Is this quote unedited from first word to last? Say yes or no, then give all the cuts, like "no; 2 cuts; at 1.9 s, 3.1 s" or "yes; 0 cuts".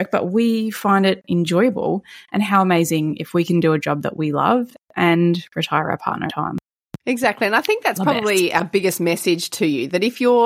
no; 2 cuts; at 6.3 s, 7.0 s